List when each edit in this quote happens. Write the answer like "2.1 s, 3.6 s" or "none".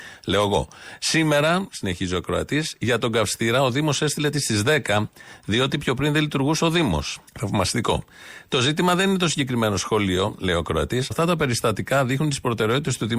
4.3 s, 7.3 s, 11.1 s